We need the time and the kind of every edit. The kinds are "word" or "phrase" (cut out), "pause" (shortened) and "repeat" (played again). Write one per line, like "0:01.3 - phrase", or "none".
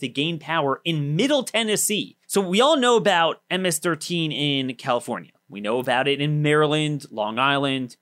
0:02.2 - pause
0:05.4 - pause